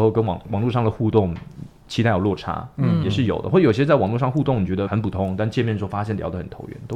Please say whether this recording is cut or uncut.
cut